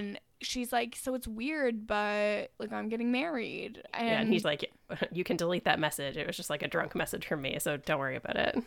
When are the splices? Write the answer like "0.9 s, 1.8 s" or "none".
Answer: 4.4 s

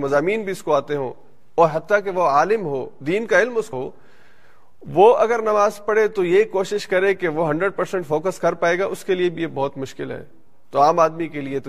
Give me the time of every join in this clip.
3.7 s

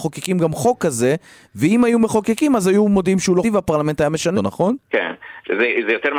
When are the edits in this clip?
3.4 s, 4.3 s, 4.8 s

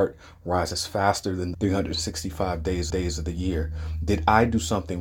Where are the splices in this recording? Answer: 1.5 s, 2.9 s

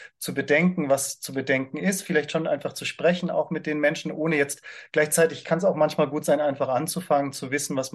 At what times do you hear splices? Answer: none

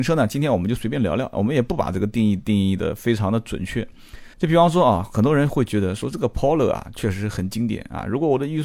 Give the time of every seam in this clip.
4.3 s

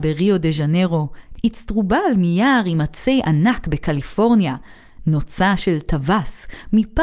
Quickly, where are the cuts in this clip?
none

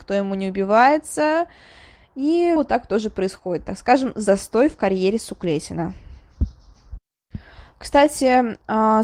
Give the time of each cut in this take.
2.6 s

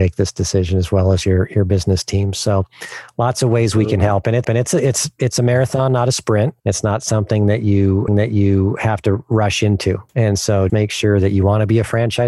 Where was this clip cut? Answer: 4.4 s, 6.6 s, 8.1 s, 10.1 s, 10.7 s

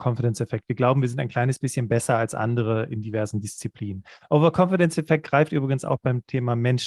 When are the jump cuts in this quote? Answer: none

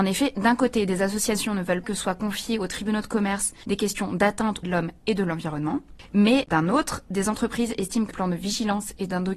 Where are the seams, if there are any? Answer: 1.8 s, 4.6 s, 8.1 s

